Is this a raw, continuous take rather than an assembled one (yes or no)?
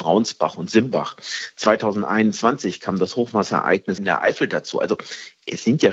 no